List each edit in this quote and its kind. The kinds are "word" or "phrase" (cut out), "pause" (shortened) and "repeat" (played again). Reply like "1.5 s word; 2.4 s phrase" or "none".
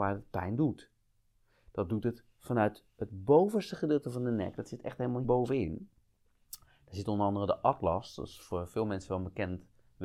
5.2 s word